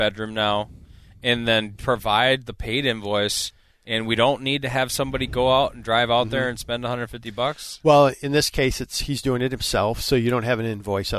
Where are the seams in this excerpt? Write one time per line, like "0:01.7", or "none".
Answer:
none